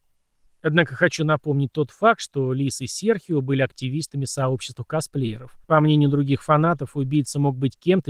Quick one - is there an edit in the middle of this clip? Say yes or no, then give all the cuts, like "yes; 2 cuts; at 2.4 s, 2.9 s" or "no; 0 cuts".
yes; 1 cut; at 5.6 s